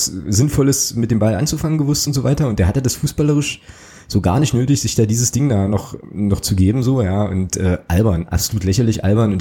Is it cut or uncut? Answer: uncut